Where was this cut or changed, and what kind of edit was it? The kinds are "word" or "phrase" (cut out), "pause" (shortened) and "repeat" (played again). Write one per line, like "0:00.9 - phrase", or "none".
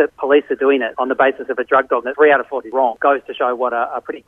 0:02.0 - word
0:02.6 - word

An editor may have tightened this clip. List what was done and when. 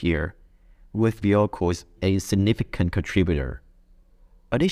0:01.2 - word
0:02.0 - word

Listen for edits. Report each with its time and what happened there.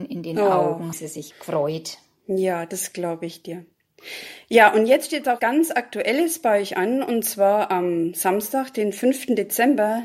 0:00.9 - word
0:01.3 - word
0:05.4 - word

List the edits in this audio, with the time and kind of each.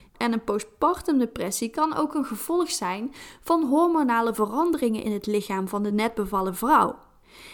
none

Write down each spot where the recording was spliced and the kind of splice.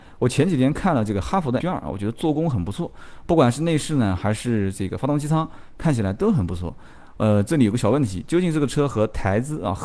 0:01.6 - word

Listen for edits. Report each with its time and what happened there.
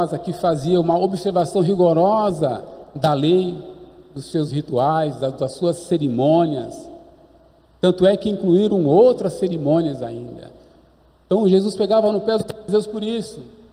none

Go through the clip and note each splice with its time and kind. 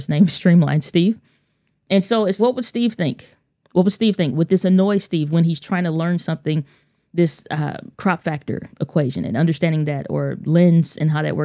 0:02.4 - word
0:07.9 - pause

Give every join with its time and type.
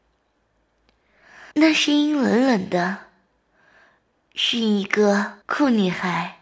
0:01.5 - pause
0:05.4 - pause

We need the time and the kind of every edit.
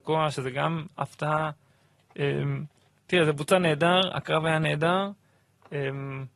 none

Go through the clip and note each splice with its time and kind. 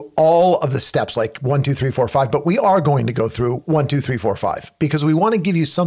none

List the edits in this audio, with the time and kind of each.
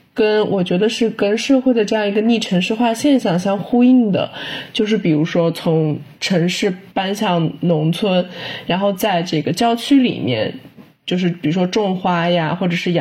0:06.9 - pause

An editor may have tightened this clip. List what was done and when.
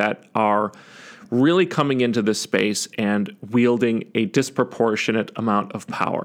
none

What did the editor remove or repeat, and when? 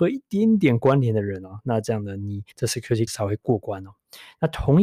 0:02.5 - pause
0:03.1 - word

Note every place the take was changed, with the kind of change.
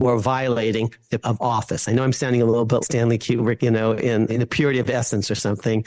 0:01.2 - word
0:02.8 - word
0:03.6 - word
0:04.3 - word

